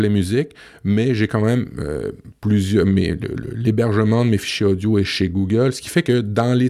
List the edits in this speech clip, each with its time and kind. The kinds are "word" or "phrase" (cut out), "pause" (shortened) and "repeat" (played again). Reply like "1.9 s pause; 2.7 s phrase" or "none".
none

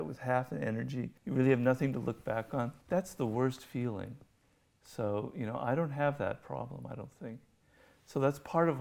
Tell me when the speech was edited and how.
1.2 s pause; 2.8 s pause

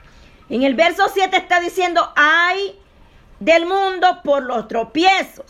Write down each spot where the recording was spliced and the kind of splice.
none

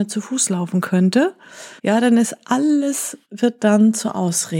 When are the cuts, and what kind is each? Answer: 1.8 s pause; 3.2 s pause

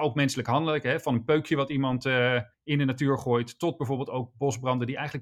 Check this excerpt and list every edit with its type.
2.5 s pause

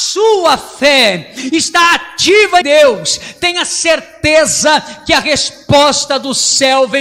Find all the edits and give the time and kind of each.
2.6 s word

